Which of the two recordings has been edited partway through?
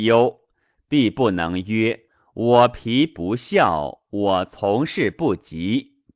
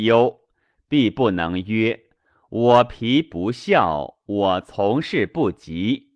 first; 1 cut; at 2.1 s

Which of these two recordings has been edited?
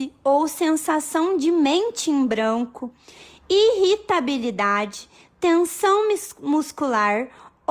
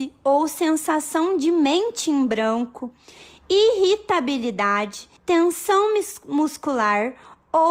second; 1 cut; at 5.2 s

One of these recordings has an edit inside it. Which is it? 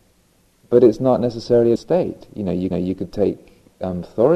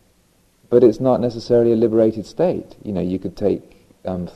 first; 2 cuts; at 1.8 s, 2.7 s

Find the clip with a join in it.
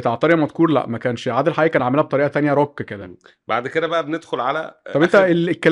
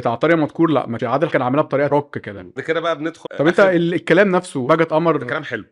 second; 6 cuts; at 1.0 s, 1.3 s, 1.9 s, 2.6 s, 3.2 s, 4.7 s

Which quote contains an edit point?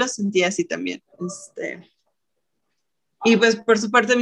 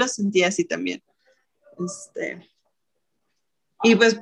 first; 1 cut; at 1.1 s

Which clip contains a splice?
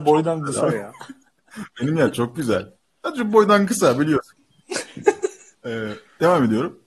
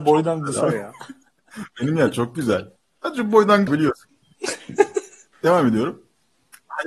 second; 2 cuts; at 3.7 s, 5.3 s

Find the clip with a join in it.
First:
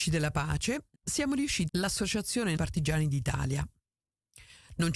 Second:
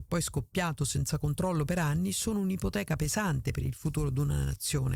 first; 3 cuts; at 1.0 s, 1.7 s, 2.6 s

